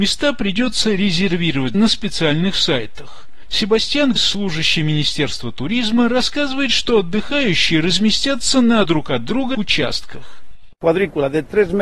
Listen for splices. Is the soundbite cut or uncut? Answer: cut